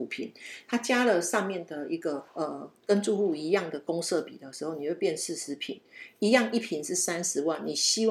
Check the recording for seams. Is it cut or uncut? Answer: cut